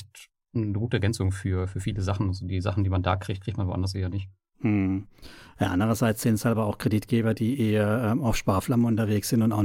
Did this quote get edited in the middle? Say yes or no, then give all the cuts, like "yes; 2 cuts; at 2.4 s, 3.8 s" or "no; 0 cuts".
no; 0 cuts